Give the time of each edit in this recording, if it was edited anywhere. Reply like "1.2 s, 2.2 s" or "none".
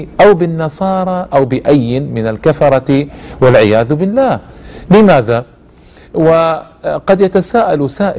none

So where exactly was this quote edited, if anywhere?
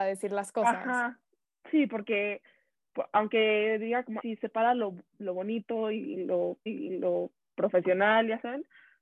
4.2 s, 6.7 s

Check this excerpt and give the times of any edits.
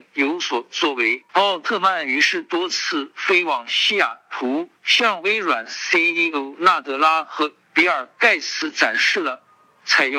1.3 s, 4.8 s

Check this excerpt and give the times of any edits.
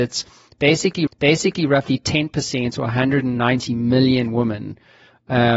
1.1 s

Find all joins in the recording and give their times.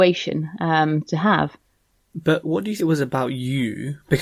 2.4 s, 2.8 s

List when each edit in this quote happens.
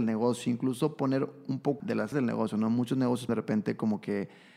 1.8 s, 2.1 s, 3.3 s

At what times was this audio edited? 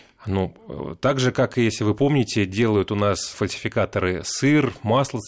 3.3 s

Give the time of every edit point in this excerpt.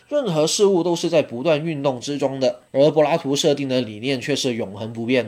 2.7 s

